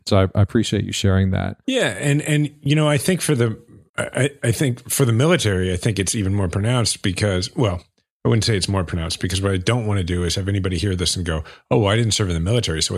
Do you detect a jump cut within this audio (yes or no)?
no